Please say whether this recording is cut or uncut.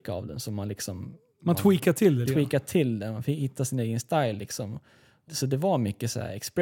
cut